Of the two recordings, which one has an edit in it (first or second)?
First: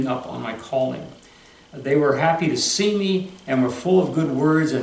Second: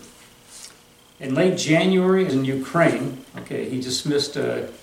second